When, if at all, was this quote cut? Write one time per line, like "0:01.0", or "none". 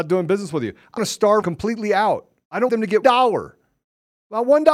0:01.0
0:01.4
0:02.7
0:03.0